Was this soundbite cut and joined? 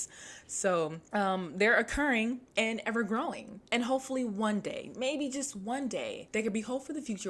yes; 2 cuts; at 2.5 s, 3.7 s

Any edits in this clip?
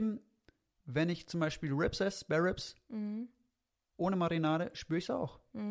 no; 0 cuts

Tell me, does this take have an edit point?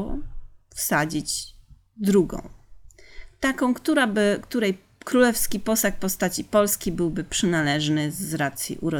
no; 0 cuts

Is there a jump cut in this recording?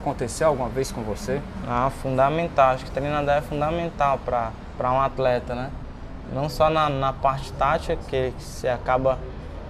no; 0 cuts

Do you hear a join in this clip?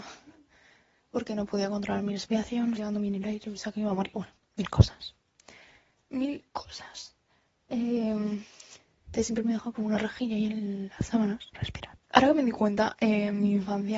yes; 4 cuts; at 2.8 s, 6.5 s, 11.5 s, 12.0 s

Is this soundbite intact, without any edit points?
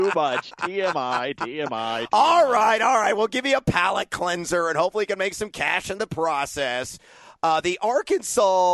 yes; 0 cuts

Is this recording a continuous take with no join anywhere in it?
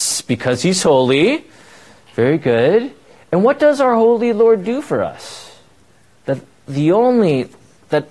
yes; 0 cuts

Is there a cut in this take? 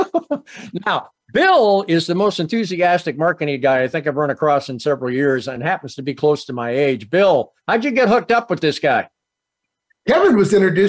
no; 0 cuts

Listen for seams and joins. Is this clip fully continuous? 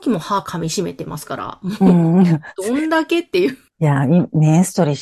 no; 1 cut; at 3.7 s

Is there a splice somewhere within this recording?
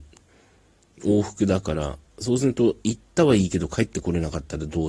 yes; 1 cut; at 2.1 s

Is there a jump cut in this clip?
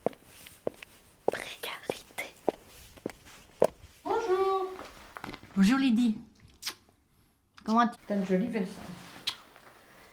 yes; 1 cut; at 7.9 s

